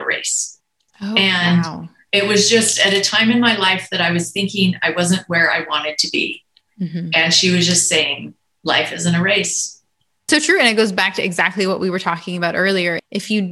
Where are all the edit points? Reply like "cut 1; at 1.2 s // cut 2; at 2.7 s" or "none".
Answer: none